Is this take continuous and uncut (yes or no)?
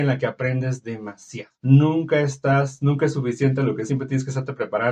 no